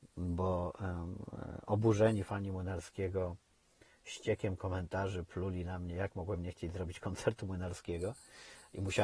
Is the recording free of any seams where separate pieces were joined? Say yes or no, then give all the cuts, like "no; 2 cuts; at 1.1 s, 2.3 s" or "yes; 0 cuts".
yes; 0 cuts